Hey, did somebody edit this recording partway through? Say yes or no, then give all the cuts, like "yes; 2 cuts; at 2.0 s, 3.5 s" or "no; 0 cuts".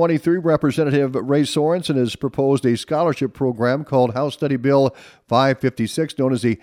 no; 0 cuts